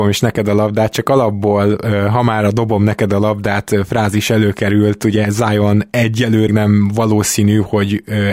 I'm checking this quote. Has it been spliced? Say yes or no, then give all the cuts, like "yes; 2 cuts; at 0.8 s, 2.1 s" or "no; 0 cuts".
yes; 1 cut; at 6.5 s